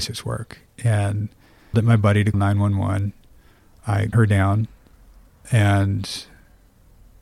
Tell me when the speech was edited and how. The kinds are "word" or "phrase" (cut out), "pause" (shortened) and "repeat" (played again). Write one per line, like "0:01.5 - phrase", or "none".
0:01.7 - word
0:02.3 - word
0:04.1 - word